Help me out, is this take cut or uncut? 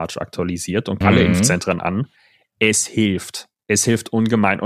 cut